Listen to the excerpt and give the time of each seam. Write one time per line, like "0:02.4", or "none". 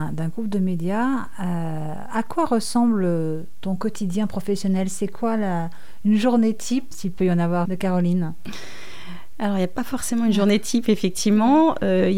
0:06.9
0:07.7